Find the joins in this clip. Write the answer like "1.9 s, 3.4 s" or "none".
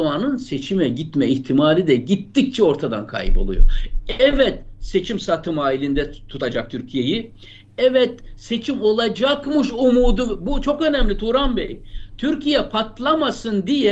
none